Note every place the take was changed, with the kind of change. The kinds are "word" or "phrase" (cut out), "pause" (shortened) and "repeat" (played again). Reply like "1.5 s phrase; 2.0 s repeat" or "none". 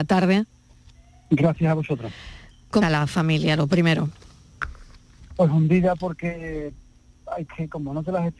2.8 s word; 7.5 s word